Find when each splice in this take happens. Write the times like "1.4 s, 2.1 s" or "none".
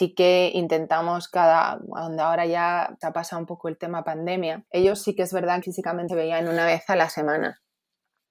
3.0 s, 4.7 s, 5.6 s, 6.1 s